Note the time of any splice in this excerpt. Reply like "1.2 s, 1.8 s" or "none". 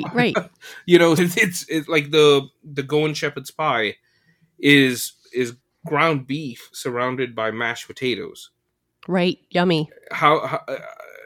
1.2 s